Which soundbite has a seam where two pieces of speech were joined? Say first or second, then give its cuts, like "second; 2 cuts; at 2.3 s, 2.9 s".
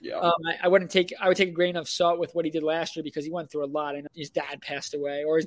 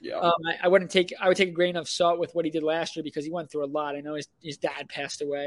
first; 1 cut; at 4.1 s